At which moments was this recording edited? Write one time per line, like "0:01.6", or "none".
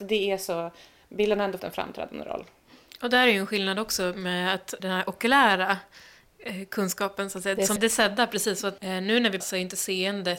0:01.6
0:04.8
0:07.8
0:08.8
0:09.4